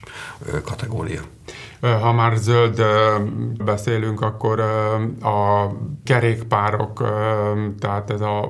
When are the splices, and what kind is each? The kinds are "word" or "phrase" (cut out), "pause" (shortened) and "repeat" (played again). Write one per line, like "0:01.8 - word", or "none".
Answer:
0:03.6 - word
0:06.1 - word